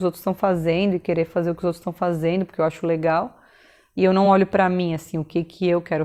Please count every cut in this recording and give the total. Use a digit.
0